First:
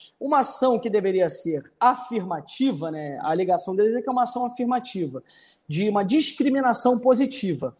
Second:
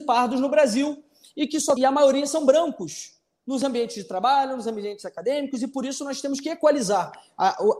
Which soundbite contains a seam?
second; 1 cut; at 1.8 s

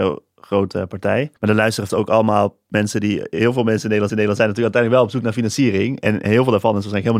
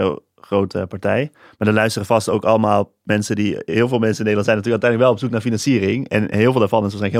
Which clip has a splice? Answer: first; 3 cuts; at 1.4 s, 1.9 s, 4.1 s

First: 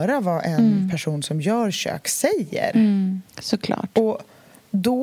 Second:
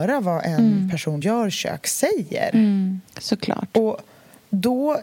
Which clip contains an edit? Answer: second; 1 cut; at 1.2 s

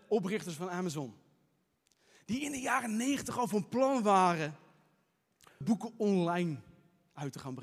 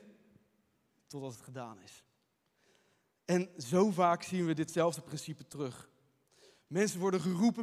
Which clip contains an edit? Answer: first; 1 cut; at 5.6 s

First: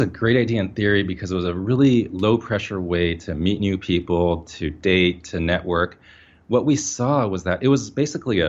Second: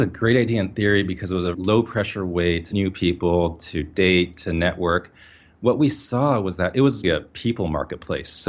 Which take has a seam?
second; 3 cuts; at 1.5 s, 2.7 s, 7.0 s

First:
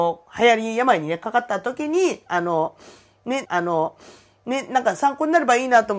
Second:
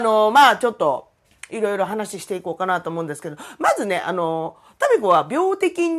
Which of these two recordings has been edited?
first; 1 cut; at 3.4 s

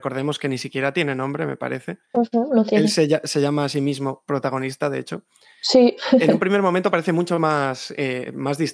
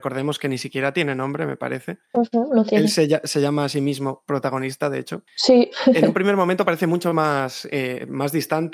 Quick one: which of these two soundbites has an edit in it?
second; 1 cut; at 5.3 s

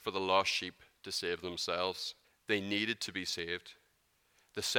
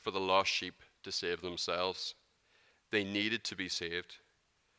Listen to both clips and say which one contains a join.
first; 1 cut; at 2.2 s

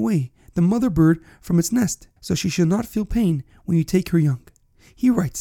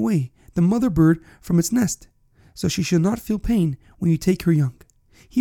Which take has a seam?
first; 1 cut; at 2.2 s

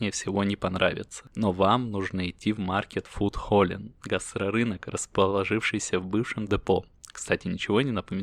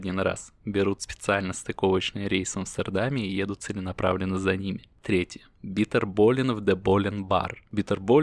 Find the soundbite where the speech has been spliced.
first; 1 cut; at 6.5 s

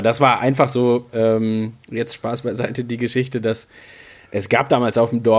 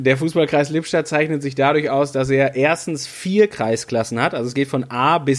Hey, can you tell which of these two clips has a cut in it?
first; 1 cut; at 1.8 s

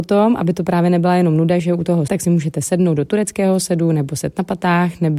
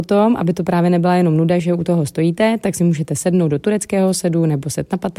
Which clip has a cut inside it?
first; 1 cut; at 2.1 s

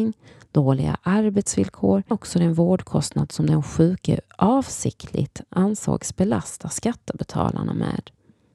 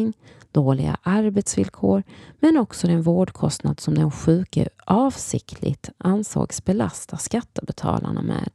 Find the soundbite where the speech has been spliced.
first; 1 cut; at 2.1 s

